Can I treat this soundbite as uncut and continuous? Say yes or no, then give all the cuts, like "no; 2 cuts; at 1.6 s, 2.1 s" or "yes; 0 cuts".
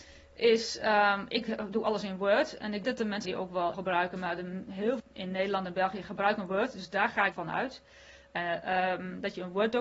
no; 5 cuts; at 2.8 s, 3.2 s, 3.7 s, 5.0 s, 7.3 s